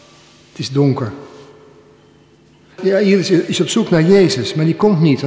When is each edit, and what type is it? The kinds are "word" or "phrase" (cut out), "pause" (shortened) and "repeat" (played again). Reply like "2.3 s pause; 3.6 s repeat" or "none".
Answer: none